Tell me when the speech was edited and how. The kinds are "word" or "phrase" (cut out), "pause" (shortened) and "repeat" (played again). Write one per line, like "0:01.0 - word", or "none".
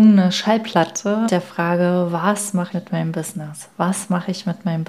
0:01.3 - word
0:02.7 - word